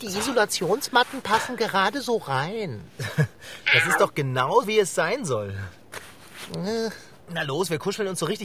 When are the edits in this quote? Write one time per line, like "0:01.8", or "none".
0:04.6